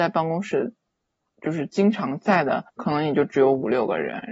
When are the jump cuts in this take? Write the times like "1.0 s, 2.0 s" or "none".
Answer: 2.7 s